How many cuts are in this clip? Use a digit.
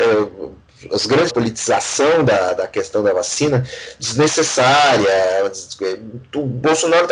3